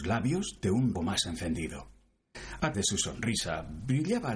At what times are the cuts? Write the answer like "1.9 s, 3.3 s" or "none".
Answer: 0.9 s, 2.7 s